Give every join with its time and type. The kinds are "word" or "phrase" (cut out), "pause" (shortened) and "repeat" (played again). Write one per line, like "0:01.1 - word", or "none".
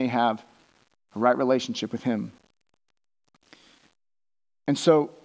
none